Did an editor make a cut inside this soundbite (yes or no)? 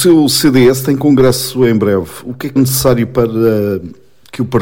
yes